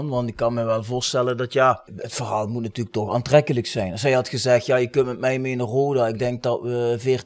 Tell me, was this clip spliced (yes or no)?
no